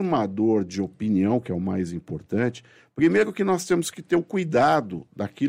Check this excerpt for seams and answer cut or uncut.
uncut